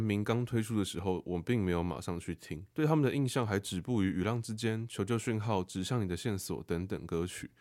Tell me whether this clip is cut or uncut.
cut